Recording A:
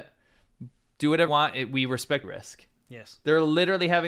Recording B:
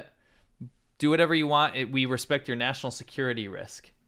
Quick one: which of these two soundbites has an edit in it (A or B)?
A